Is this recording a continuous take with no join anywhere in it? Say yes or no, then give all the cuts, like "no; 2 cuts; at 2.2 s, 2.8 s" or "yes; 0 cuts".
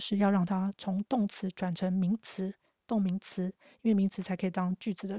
yes; 0 cuts